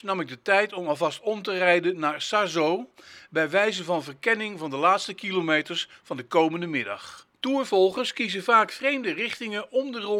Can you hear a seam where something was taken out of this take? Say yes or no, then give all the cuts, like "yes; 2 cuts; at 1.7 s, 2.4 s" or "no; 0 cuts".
yes; 1 cut; at 7.3 s